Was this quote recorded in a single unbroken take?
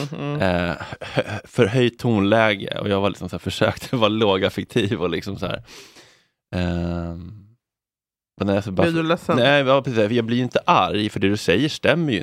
yes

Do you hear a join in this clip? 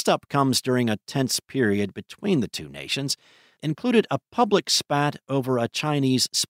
yes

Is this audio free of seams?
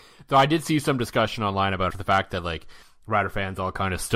no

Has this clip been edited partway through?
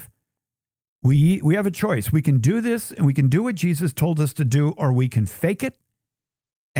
no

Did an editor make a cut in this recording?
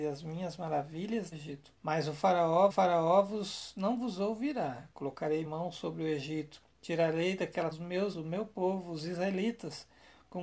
yes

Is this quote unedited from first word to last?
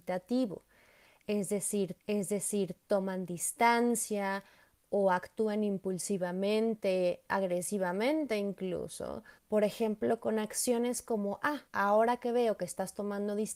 no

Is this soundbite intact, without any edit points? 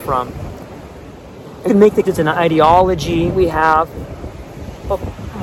no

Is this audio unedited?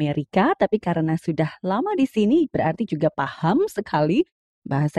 yes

